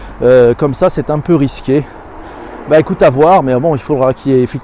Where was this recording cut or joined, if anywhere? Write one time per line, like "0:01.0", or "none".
none